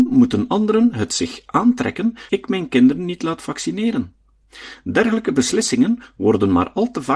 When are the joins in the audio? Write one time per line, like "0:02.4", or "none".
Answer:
0:02.3